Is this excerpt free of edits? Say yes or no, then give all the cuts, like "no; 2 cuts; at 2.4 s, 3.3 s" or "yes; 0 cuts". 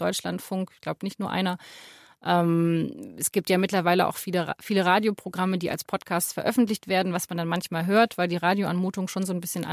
yes; 0 cuts